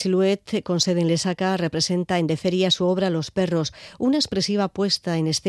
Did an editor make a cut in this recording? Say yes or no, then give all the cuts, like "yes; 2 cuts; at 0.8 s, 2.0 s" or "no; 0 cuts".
no; 0 cuts